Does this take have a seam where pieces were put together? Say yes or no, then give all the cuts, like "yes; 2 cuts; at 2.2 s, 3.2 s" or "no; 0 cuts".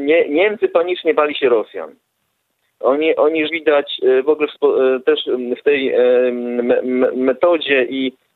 yes; 2 cuts; at 3.5 s, 4.5 s